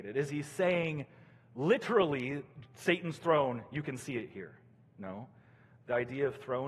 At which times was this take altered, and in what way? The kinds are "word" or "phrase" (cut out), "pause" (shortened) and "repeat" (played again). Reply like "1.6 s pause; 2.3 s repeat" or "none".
none